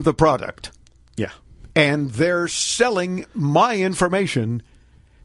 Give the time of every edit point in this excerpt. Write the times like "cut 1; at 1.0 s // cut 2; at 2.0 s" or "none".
none